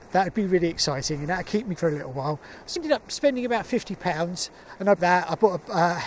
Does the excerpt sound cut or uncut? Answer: cut